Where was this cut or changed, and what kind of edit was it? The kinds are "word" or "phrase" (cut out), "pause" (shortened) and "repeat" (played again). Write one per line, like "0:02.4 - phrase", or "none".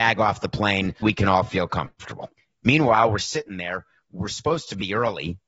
0:01.0 - word
0:02.4 - pause